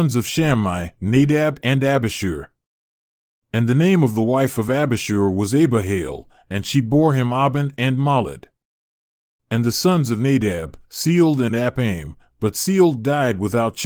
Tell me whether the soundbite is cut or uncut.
uncut